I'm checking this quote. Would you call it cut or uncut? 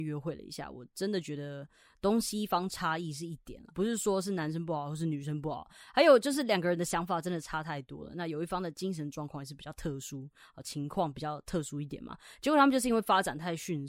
cut